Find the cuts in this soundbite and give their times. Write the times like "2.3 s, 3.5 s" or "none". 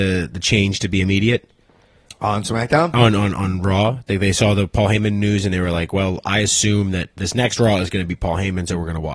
none